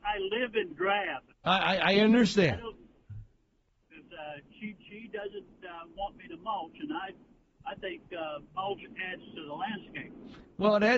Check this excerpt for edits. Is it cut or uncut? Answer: cut